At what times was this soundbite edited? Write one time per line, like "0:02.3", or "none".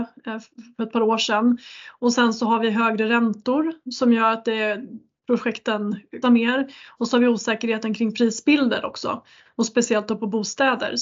0:06.2